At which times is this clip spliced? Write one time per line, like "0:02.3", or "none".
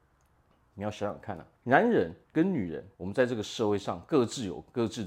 0:01.5
0:02.2
0:02.9